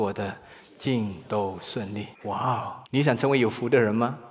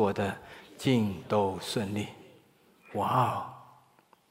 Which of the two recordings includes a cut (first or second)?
first